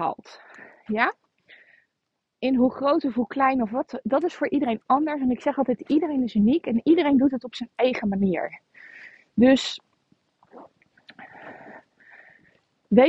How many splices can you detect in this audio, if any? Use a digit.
0